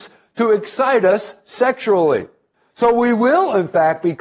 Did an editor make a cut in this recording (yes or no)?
no